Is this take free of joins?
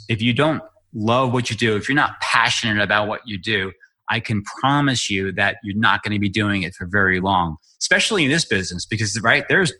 yes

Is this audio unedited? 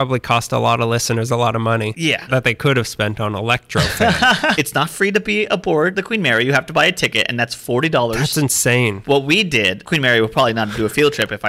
yes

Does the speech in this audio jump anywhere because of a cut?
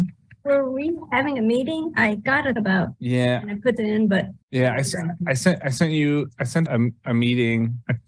yes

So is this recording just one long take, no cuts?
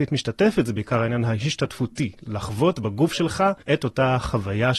no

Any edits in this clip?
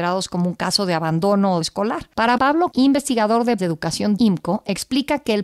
yes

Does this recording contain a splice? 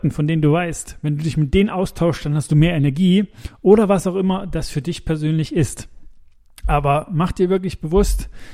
no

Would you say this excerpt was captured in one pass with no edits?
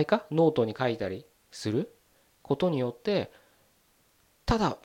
yes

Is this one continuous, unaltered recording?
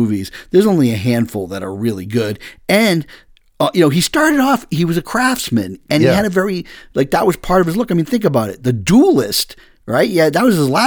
yes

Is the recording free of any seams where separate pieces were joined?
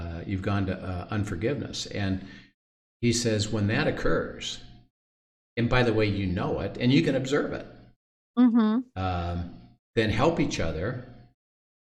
yes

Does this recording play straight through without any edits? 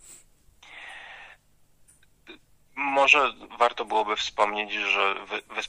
yes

